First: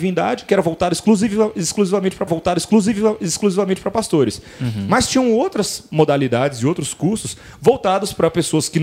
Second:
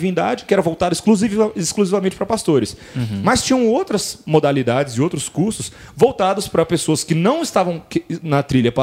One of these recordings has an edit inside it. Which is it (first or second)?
first